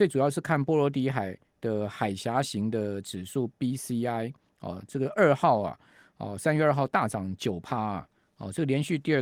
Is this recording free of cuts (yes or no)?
yes